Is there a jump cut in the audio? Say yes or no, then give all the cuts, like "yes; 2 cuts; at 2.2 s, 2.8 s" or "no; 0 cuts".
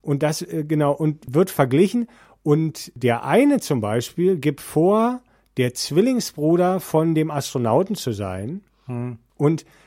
no; 0 cuts